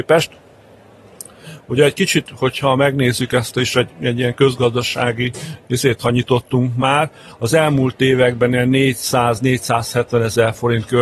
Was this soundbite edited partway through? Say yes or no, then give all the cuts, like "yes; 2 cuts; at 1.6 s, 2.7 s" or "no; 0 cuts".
no; 0 cuts